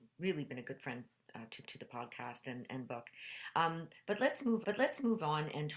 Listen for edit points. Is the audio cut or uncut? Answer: cut